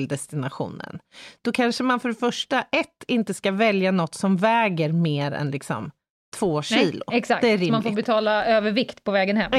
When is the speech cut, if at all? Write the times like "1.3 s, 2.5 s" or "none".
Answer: none